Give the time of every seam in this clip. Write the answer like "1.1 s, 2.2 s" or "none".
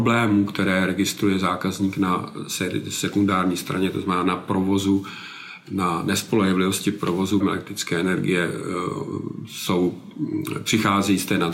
7.4 s